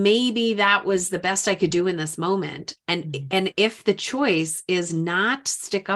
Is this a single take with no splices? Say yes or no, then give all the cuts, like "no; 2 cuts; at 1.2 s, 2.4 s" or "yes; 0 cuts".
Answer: yes; 0 cuts